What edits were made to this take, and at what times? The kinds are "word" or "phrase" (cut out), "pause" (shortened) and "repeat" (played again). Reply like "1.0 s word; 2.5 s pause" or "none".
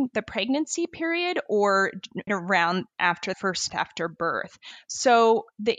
2.3 s word; 3.3 s word; 3.7 s word